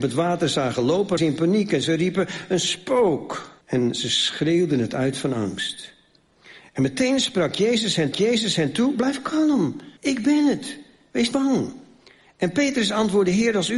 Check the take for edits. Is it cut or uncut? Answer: cut